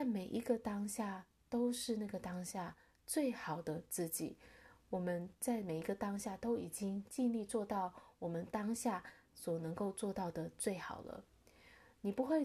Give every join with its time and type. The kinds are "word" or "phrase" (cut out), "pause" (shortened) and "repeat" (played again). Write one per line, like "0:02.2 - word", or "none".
none